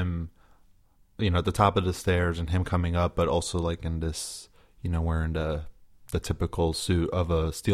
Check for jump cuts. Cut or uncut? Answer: uncut